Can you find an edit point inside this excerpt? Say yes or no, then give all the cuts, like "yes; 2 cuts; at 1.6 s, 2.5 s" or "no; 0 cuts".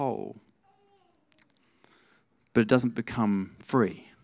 no; 0 cuts